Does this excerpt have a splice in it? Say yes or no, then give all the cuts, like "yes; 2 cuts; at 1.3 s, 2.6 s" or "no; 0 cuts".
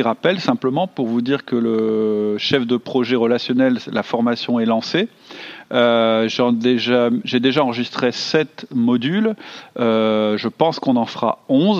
no; 0 cuts